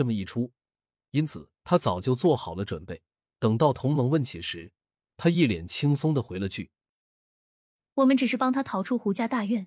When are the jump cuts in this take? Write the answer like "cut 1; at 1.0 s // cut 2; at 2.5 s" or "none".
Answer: cut 1; at 1.6 s // cut 2; at 3.1 s